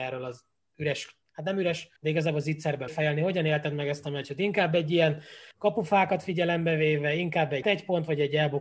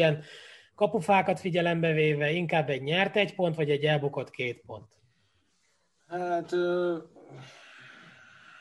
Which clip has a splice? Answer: first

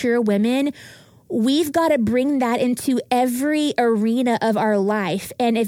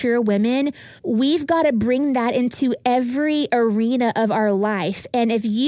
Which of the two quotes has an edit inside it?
second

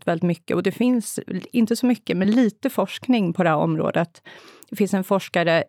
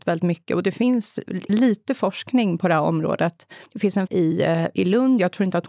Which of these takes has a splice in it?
second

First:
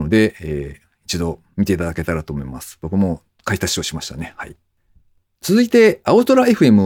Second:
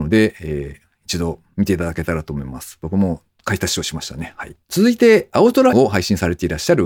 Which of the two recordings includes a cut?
second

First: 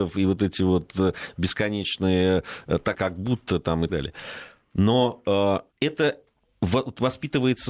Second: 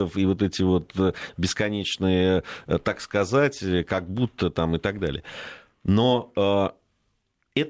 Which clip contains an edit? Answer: first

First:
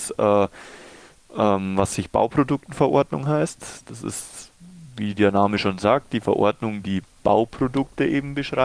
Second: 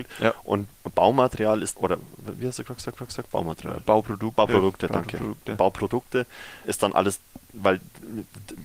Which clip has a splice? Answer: second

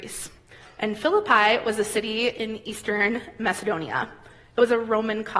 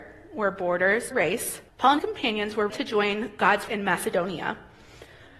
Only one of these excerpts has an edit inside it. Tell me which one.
second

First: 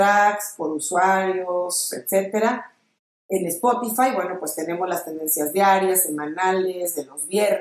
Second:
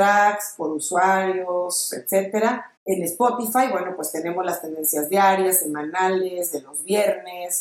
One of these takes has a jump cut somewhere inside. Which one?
second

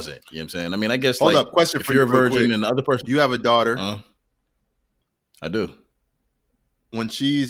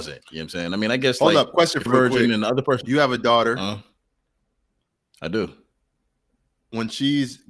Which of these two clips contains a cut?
second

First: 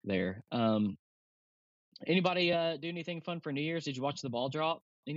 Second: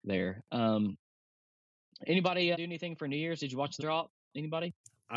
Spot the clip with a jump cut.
second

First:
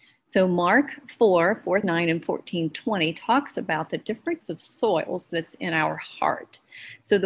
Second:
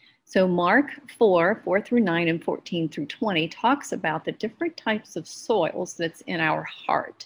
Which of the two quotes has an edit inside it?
first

